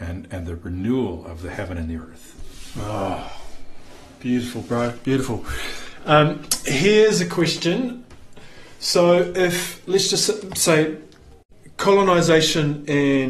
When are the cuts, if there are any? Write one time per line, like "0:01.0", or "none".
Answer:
none